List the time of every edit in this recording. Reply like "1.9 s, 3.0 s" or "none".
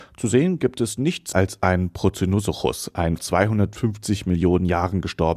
1.3 s, 3.2 s